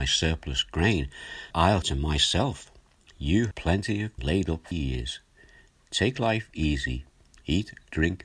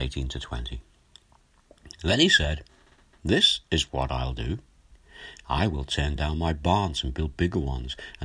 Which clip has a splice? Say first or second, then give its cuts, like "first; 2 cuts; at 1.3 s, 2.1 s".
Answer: first; 5 cuts; at 1.5 s, 1.8 s, 3.5 s, 4.2 s, 4.7 s